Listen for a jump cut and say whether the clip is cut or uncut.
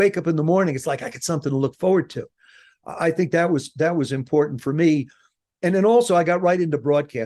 uncut